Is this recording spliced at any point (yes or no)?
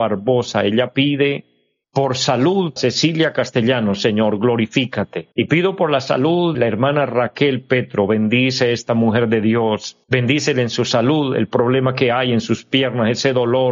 yes